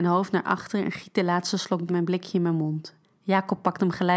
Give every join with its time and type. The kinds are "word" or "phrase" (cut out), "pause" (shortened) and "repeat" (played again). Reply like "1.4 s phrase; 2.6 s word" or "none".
1.9 s phrase; 3.0 s pause